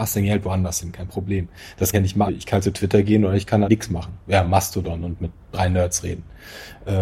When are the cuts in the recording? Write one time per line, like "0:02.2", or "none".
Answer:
0:01.9
0:02.3
0:03.6
0:05.4